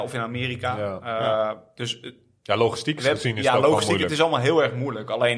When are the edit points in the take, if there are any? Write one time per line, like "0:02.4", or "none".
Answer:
none